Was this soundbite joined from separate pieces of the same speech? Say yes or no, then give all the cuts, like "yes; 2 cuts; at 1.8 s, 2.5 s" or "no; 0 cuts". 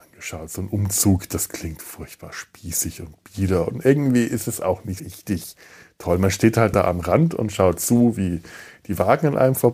yes; 1 cut; at 5.0 s